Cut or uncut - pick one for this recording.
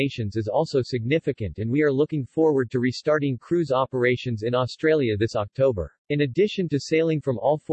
cut